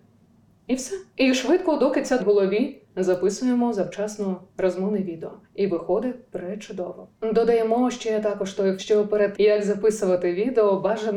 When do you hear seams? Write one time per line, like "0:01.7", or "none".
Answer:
0:01.1
0:02.2
0:02.9
0:04.5
0:05.4
0:07.1
0:08.8
0:09.3